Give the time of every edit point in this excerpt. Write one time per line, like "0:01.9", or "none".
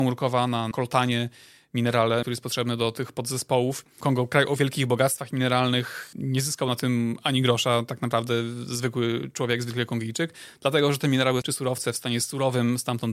none